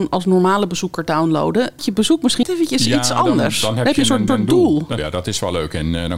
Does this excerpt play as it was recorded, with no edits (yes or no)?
no